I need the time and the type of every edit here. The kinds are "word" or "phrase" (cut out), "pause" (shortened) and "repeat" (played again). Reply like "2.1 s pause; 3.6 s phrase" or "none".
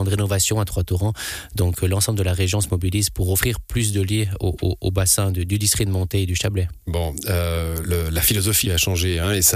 7.8 s word; 8.6 s word